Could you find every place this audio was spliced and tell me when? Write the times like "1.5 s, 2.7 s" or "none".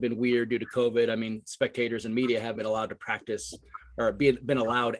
2.6 s